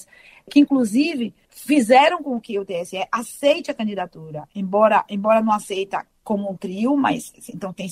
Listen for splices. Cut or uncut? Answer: uncut